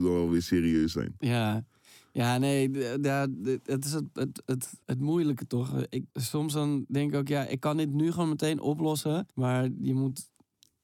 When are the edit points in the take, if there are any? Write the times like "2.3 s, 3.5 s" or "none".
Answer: 4.8 s, 6.1 s, 9.3 s